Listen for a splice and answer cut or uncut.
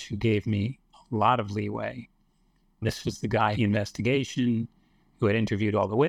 cut